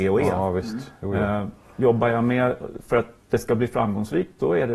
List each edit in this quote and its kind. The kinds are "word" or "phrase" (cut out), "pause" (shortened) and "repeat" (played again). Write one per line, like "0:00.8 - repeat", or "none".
none